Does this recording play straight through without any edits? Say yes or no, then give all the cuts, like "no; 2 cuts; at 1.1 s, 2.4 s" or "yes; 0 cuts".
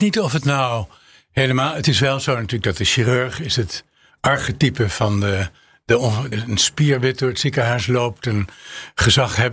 no; 1 cut; at 6.3 s